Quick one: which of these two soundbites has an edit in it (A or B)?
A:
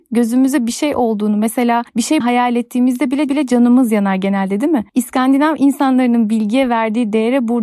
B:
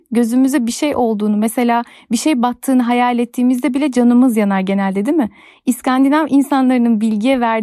A